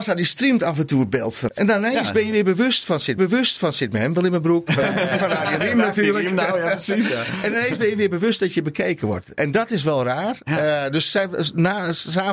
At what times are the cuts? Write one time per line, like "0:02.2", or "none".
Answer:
0:01.5
0:03.2